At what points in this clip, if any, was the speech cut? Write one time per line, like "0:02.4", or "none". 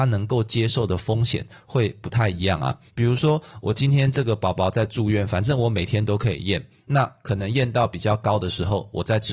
0:02.9